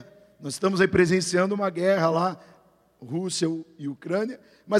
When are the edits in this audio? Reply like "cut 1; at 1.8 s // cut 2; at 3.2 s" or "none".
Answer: none